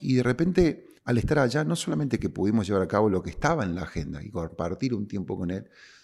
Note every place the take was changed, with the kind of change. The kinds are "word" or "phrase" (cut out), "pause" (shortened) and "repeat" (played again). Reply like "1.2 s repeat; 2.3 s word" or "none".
1.0 s pause